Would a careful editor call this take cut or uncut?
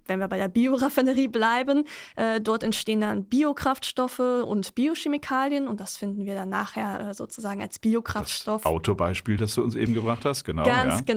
uncut